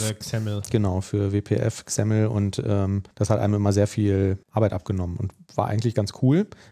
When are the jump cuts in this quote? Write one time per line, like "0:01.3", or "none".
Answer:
0:03.1
0:04.4